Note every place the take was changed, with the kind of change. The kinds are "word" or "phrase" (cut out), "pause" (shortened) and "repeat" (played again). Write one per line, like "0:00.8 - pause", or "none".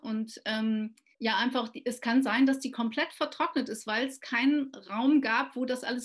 0:01.1 - pause